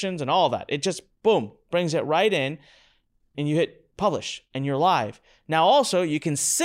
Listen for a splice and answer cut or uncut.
cut